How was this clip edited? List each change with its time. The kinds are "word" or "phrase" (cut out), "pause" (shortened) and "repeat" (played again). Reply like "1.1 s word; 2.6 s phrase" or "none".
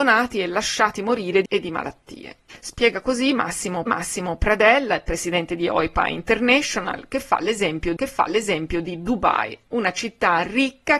1.5 s word; 3.9 s repeat; 8.0 s repeat